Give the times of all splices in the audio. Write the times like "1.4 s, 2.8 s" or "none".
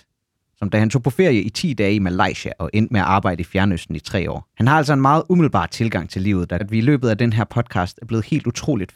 4.5 s, 6.6 s